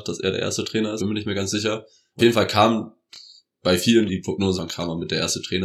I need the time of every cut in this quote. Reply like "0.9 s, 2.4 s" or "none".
1.0 s, 2.2 s, 4.1 s, 4.6 s